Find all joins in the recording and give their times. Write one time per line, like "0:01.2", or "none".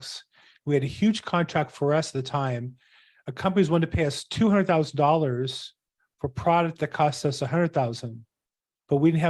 none